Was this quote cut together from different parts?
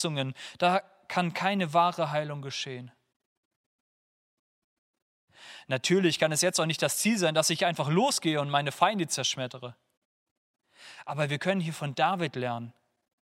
no; 0 cuts

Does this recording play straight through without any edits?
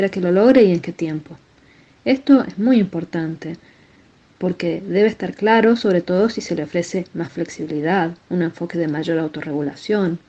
yes; 0 cuts

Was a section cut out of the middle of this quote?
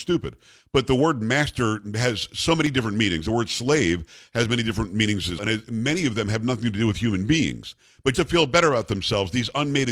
yes; 2 cuts; at 5.4 s, 8.1 s

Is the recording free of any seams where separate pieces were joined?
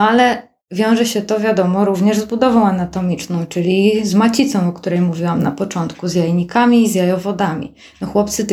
yes; 0 cuts

